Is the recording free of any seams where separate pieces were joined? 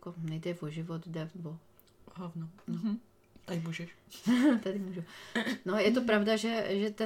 yes; 0 cuts

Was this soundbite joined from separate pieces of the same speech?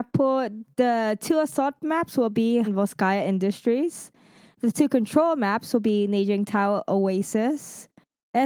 yes; 1 cut; at 2.6 s

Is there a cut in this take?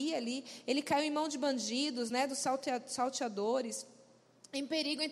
no; 0 cuts

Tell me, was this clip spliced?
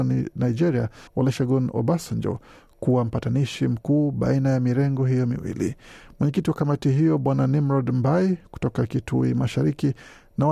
yes; 1 cut; at 1.1 s

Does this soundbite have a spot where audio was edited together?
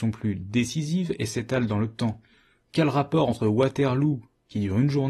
no; 0 cuts

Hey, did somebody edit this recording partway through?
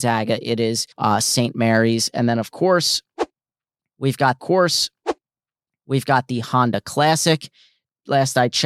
yes; 2 cuts; at 0.9 s, 4.4 s

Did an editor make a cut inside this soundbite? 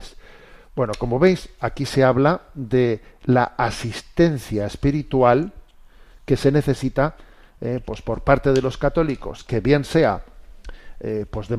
no; 0 cuts

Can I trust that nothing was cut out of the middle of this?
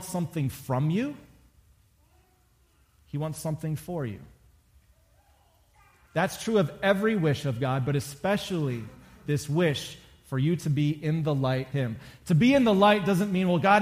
no; 1 cut; at 11.7 s

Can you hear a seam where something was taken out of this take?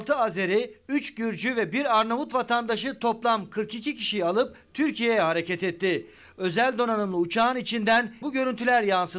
yes; 1 cut; at 8.2 s

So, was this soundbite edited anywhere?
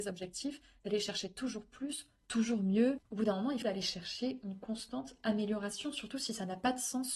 yes; 2 cuts; at 3.0 s, 3.6 s

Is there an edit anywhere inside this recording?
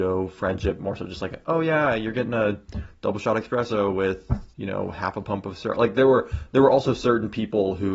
yes; 1 cut; at 4.5 s

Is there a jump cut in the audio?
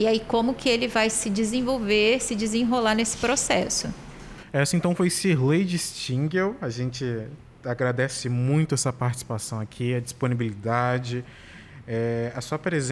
no; 0 cuts

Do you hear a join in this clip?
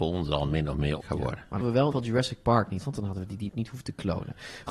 yes; 5 cuts; at 1.0 s, 1.6 s, 1.9 s, 2.8 s, 3.5 s

